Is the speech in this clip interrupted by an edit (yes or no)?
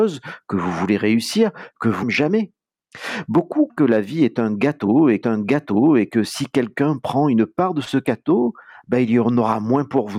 yes